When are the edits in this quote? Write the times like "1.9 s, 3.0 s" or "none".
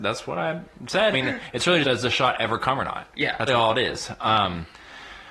1.1 s, 1.8 s, 3.5 s

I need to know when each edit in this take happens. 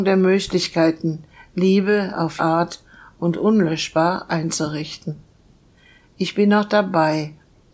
2.4 s

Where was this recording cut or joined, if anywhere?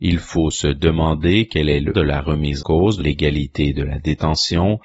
1.9 s, 2.6 s, 3.0 s

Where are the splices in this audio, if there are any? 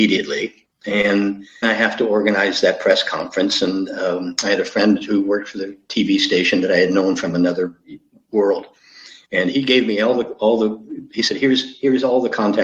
1.6 s

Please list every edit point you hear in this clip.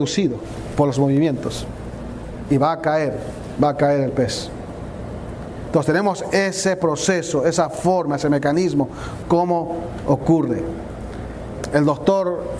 none

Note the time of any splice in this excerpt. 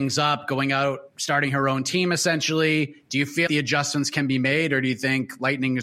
3.5 s

